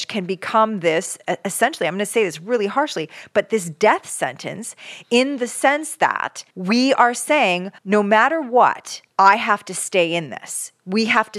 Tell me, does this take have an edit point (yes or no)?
yes